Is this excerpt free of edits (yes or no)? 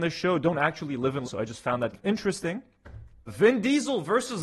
no